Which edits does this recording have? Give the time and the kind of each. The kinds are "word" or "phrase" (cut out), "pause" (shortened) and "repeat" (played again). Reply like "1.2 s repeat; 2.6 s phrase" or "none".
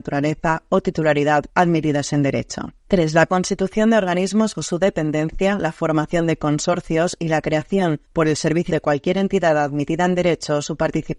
1.5 s word; 2.8 s pause; 4.5 s word; 8.1 s pause; 8.7 s phrase